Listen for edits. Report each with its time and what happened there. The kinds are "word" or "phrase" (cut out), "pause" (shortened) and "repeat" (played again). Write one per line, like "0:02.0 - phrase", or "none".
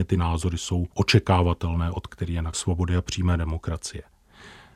0:00.9 - pause
0:02.1 - word
0:02.5 - phrase